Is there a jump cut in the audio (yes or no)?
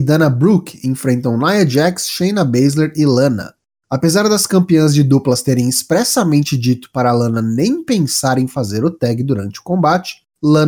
no